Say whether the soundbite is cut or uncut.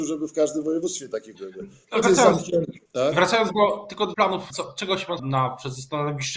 cut